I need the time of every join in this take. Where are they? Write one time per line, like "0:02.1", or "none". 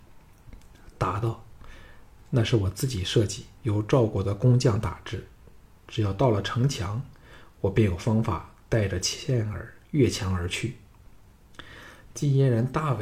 0:03.6